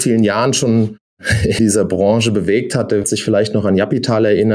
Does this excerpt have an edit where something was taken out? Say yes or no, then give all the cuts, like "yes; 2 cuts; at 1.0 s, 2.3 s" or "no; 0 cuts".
yes; 2 cuts; at 1.6 s, 3.0 s